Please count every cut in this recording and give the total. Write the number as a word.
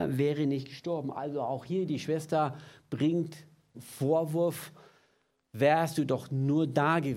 one